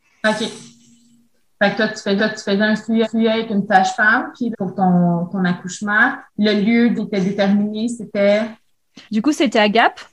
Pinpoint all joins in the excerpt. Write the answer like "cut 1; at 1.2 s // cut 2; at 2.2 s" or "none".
cut 1; at 2.2 s // cut 2; at 3.0 s // cut 3; at 4.5 s // cut 4; at 6.3 s // cut 5; at 6.9 s // cut 6; at 9.0 s